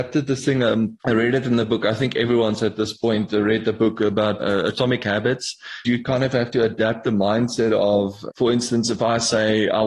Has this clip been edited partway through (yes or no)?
yes